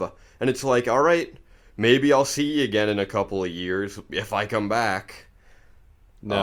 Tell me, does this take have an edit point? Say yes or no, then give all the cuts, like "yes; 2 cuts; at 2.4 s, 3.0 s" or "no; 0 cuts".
no; 0 cuts